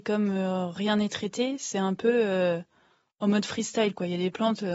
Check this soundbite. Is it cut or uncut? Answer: uncut